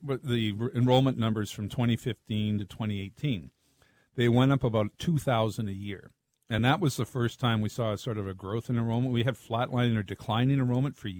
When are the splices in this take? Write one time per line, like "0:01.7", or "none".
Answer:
none